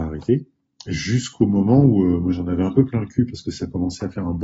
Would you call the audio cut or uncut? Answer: uncut